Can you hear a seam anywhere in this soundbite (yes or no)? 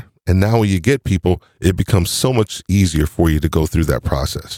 no